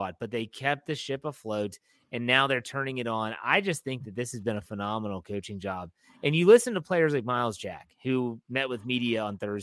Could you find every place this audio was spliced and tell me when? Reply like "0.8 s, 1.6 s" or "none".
none

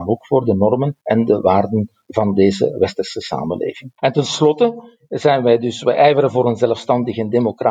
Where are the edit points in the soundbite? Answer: 1.0 s, 4.0 s

